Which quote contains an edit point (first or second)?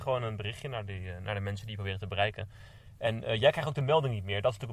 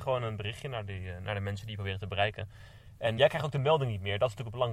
second